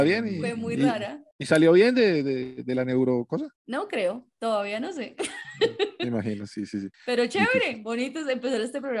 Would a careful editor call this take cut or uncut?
cut